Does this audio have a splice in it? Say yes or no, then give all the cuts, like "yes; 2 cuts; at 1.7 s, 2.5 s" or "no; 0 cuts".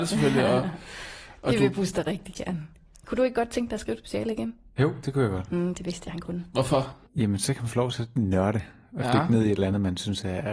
no; 0 cuts